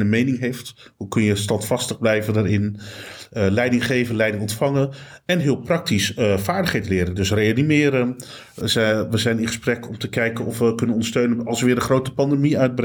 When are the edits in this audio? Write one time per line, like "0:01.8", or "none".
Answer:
none